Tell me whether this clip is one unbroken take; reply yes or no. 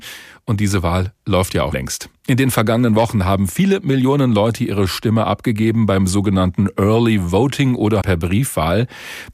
no